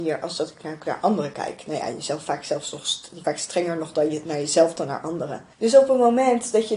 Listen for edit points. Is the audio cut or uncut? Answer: cut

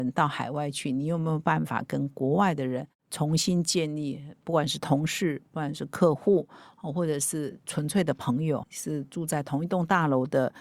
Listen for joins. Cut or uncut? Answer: cut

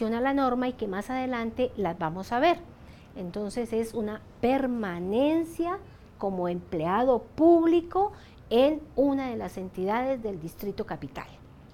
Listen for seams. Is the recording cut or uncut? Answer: uncut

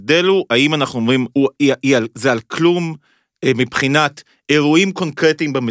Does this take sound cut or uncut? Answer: cut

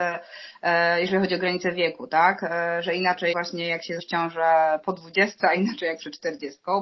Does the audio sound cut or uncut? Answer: cut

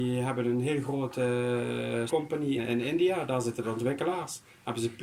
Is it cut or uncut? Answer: cut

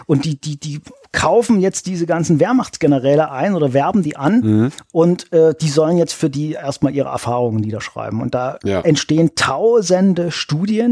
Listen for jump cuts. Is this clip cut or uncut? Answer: uncut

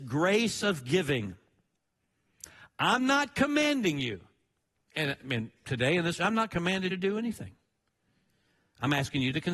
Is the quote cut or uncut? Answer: cut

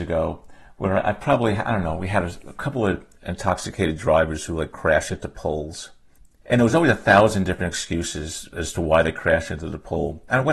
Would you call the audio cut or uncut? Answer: uncut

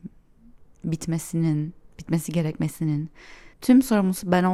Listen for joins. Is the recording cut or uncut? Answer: cut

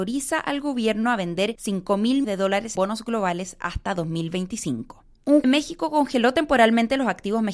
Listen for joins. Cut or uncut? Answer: cut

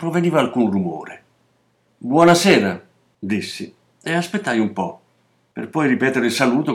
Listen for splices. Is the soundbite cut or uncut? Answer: uncut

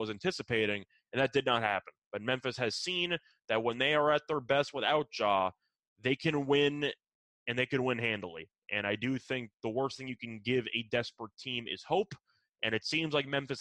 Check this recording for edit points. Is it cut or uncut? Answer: uncut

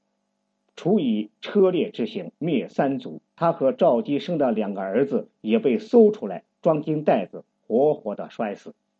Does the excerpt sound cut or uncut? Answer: cut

